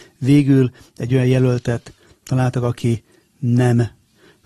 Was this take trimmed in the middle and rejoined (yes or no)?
no